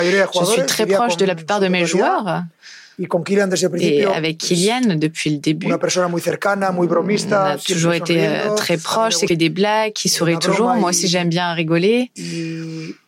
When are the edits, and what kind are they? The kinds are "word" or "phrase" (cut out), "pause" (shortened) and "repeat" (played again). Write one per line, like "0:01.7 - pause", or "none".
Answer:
0:09.3 - phrase